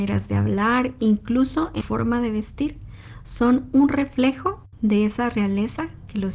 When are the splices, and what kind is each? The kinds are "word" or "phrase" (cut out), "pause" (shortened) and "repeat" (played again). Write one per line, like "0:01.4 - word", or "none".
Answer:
0:01.8 - word